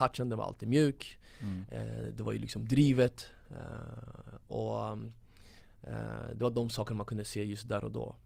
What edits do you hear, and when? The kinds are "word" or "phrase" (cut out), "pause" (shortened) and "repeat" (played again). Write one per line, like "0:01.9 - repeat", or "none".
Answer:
none